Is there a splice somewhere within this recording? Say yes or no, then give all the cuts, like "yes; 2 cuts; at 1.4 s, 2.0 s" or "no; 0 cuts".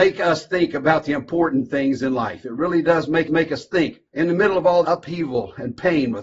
yes; 3 cuts; at 3.3 s, 4.1 s, 4.8 s